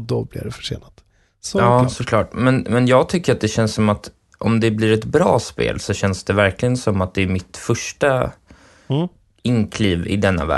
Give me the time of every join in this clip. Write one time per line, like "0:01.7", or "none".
none